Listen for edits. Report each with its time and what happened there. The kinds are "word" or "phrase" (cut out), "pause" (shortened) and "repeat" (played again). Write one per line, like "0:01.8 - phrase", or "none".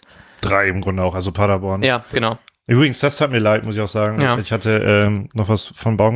none